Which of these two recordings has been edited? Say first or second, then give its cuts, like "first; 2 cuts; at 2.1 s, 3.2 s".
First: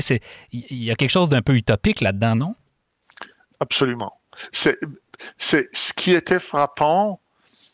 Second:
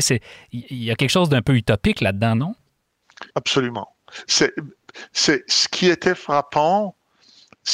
second; 1 cut; at 3.3 s